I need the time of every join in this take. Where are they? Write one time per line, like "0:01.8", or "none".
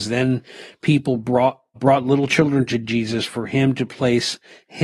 0:01.8